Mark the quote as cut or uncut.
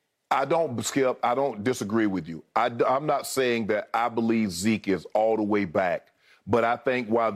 uncut